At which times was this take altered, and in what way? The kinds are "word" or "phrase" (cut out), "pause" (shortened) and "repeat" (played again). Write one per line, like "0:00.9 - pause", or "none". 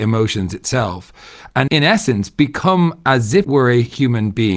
0:01.7 - word
0:03.4 - word